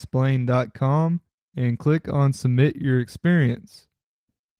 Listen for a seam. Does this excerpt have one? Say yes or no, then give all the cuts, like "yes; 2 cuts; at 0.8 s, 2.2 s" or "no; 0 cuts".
no; 0 cuts